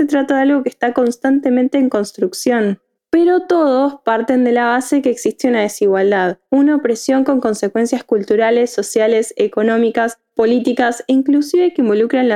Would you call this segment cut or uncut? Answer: cut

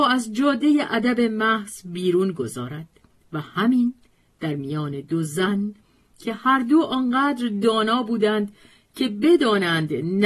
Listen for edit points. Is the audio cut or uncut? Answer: uncut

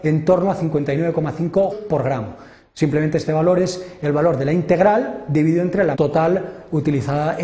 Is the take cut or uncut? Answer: cut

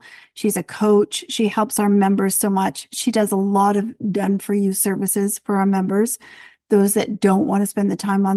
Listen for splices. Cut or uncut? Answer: uncut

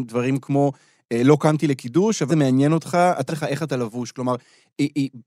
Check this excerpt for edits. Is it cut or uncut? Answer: cut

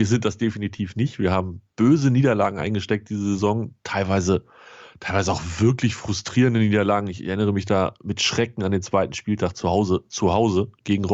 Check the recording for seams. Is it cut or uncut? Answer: uncut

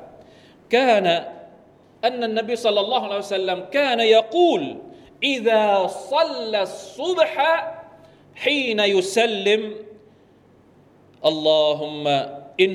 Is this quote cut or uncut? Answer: uncut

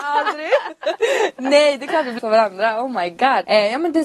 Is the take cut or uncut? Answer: cut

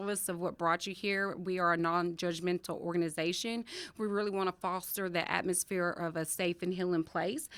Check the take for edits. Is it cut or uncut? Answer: uncut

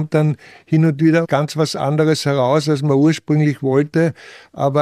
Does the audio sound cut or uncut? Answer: uncut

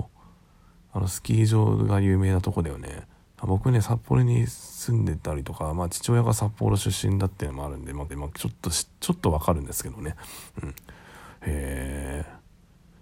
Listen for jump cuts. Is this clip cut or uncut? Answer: cut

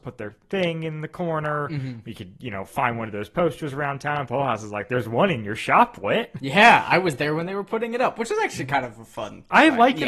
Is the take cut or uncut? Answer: uncut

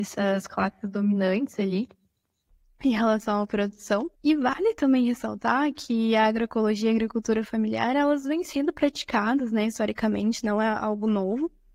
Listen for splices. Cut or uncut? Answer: cut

